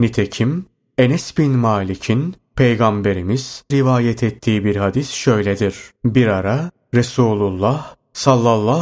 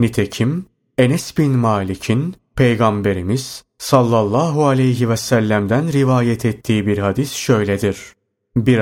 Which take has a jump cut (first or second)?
first